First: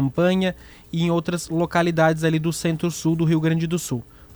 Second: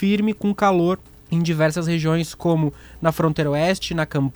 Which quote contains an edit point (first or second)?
second